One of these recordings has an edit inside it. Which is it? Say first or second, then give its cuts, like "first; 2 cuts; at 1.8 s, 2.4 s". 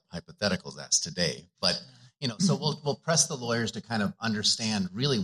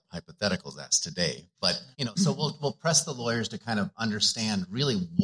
second; 1 cut; at 1.9 s